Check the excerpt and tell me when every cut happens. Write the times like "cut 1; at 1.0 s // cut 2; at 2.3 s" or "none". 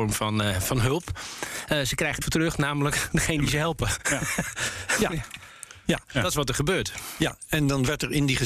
cut 1; at 2.2 s